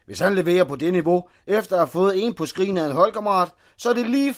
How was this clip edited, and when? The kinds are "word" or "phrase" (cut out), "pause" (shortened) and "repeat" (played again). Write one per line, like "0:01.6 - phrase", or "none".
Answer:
none